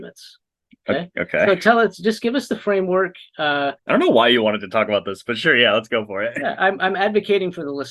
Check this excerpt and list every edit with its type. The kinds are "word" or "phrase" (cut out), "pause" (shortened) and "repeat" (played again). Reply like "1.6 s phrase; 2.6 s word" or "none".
3.8 s pause